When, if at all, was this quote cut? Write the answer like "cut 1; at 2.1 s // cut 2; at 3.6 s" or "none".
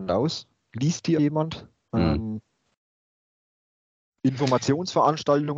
cut 1; at 1.2 s